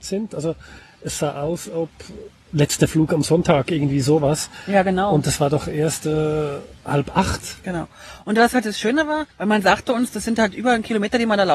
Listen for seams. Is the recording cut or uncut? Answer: cut